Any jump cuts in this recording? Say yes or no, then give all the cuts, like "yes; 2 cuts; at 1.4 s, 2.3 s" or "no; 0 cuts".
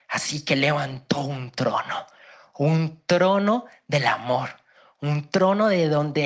no; 0 cuts